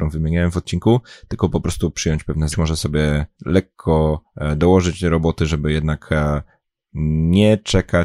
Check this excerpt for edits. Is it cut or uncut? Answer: cut